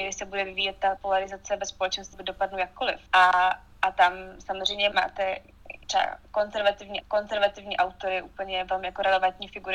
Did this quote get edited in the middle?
yes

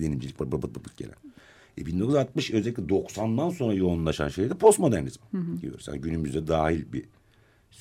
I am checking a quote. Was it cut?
no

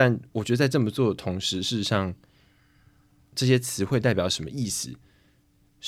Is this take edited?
no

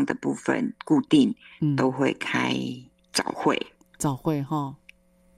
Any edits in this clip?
no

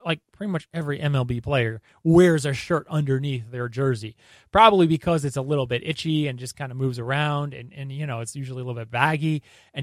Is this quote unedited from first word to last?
yes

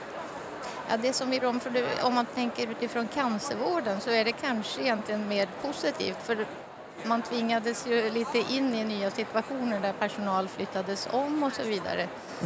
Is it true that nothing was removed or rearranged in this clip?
no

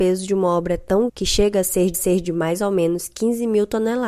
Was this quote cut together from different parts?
yes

